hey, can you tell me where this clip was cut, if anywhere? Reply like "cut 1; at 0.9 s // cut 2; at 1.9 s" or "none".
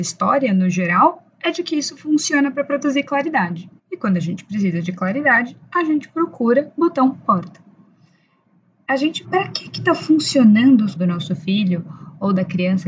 cut 1; at 3.8 s // cut 2; at 6.8 s // cut 3; at 7.2 s // cut 4; at 9.2 s // cut 5; at 10.9 s